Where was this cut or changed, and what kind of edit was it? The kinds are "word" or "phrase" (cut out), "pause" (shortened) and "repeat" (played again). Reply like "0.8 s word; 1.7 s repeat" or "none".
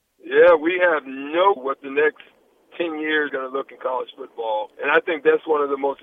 1.6 s word; 3.3 s word; 3.7 s word; 4.7 s pause

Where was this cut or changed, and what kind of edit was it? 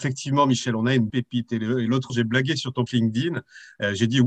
1.1 s word; 2.1 s word; 2.9 s word

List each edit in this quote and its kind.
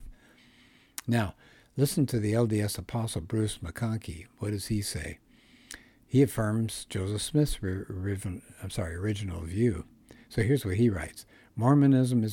none

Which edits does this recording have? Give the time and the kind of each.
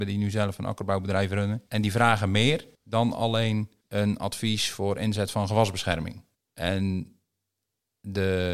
1.7 s pause; 2.7 s pause; 3.8 s pause; 6.3 s pause

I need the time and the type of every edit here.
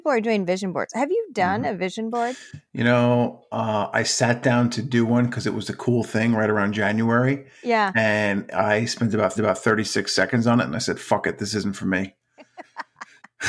9.4 s repeat

